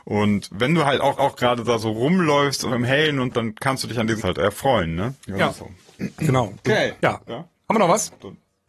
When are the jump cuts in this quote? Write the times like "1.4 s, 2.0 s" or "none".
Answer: 1.2 s, 2.7 s, 3.3 s, 4.2 s, 5.2 s, 5.6 s, 7.0 s